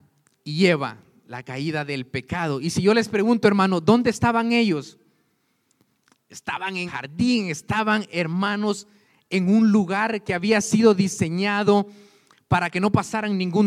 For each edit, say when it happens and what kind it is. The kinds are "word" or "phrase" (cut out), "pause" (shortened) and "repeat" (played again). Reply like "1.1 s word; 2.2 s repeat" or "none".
6.9 s word